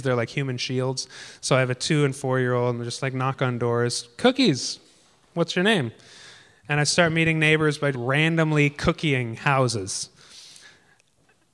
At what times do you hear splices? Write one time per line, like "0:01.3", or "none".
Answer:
0:07.9